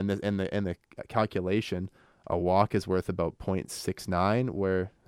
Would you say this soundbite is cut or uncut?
uncut